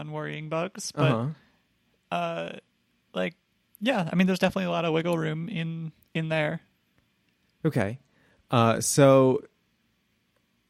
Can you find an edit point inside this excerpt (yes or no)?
no